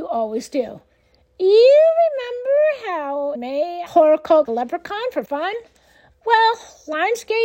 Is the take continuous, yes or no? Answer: no